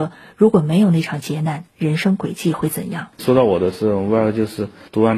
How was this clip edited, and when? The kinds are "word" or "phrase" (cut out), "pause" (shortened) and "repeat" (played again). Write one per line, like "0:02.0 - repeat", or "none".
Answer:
0:03.1 - pause